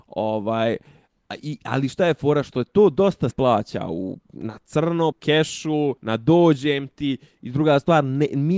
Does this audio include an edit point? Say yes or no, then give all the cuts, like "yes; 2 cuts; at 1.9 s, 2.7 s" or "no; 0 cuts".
yes; 4 cuts; at 3.3 s, 4.2 s, 5.1 s, 6.0 s